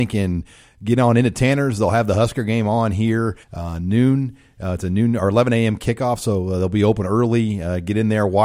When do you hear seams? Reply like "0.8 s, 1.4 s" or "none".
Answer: 3.4 s